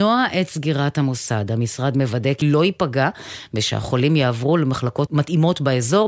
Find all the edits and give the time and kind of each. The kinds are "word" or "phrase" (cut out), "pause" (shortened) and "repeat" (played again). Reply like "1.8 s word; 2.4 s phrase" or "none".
2.4 s phrase; 5.1 s word